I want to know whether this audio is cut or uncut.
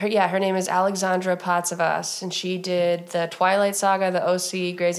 uncut